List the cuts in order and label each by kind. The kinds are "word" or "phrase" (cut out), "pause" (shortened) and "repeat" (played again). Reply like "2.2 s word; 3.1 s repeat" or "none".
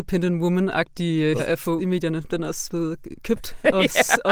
1.4 s word; 1.8 s word; 2.7 s word